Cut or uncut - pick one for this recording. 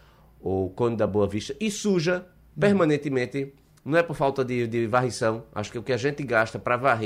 uncut